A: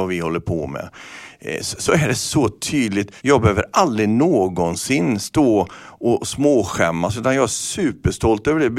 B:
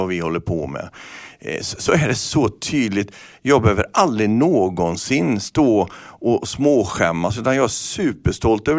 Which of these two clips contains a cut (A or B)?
A